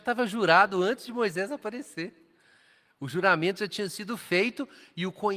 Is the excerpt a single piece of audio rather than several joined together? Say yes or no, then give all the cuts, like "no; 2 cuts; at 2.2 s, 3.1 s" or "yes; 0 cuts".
yes; 0 cuts